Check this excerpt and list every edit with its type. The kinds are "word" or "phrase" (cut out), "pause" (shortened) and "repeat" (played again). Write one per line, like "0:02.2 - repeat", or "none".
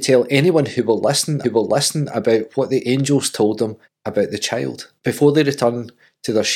0:01.4 - repeat
0:03.8 - pause
0:05.0 - pause